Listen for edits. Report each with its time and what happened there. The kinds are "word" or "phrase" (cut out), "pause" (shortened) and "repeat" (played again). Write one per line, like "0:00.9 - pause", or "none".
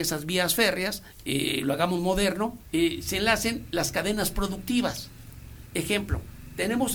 0:01.1 - pause
0:02.6 - pause